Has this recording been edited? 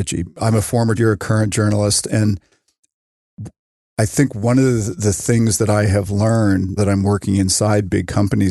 yes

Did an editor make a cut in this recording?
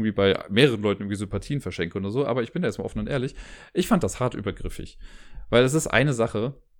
no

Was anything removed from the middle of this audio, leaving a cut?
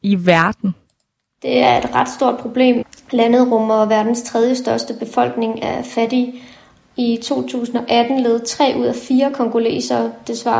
no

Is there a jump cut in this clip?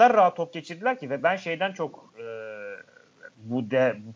no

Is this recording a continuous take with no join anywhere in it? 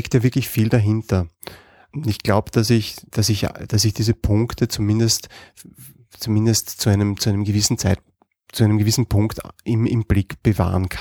yes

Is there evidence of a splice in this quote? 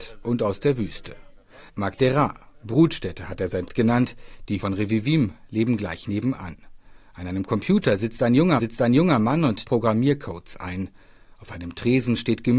yes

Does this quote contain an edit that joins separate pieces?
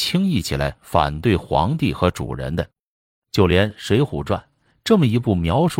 no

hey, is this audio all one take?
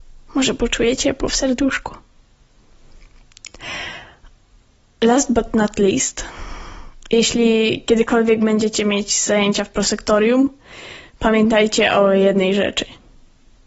yes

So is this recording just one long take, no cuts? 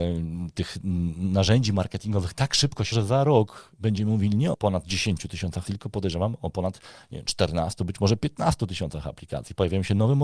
no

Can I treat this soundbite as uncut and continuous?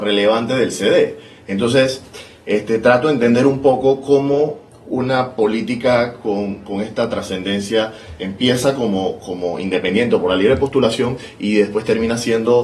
yes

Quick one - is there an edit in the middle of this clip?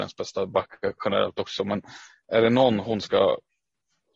no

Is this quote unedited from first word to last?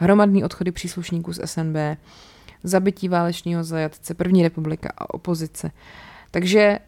yes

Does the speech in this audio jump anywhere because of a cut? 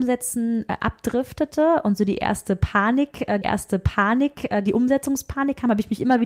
yes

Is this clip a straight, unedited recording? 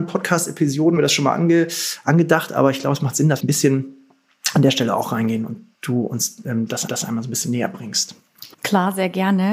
no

